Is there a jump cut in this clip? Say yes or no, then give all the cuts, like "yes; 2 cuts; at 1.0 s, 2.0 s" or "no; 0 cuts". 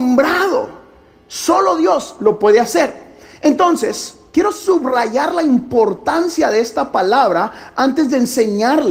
no; 0 cuts